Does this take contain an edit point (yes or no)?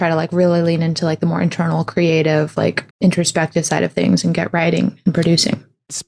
yes